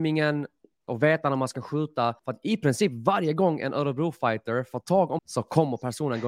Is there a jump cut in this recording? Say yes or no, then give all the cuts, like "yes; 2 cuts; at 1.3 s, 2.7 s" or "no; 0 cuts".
yes; 2 cuts; at 2.2 s, 5.2 s